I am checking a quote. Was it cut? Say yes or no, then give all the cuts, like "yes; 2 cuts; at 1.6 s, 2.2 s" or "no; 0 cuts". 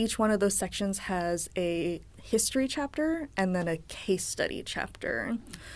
no; 0 cuts